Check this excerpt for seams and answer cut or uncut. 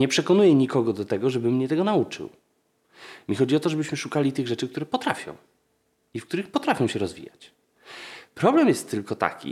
uncut